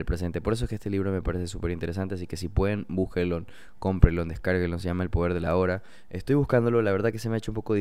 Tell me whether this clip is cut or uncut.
uncut